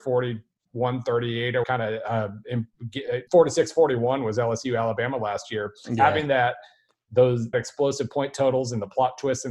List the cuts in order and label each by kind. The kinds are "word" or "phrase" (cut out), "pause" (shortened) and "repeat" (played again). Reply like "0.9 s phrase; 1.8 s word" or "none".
1.6 s word; 3.3 s pause; 7.5 s word